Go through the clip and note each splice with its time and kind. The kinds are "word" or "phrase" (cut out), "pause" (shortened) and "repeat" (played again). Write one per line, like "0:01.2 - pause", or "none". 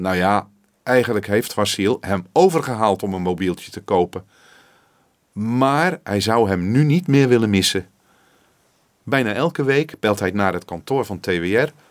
none